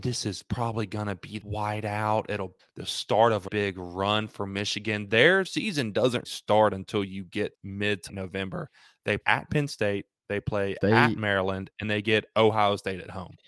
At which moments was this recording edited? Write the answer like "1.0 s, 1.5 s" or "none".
1.4 s, 2.6 s, 3.5 s, 5.4 s, 6.2 s, 7.5 s, 8.1 s, 9.2 s, 11.8 s